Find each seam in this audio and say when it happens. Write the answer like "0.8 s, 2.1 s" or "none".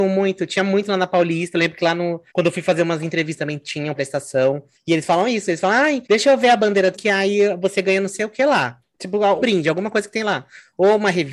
2.3 s, 3.4 s, 4.0 s, 4.7 s, 6.0 s, 6.9 s, 9.4 s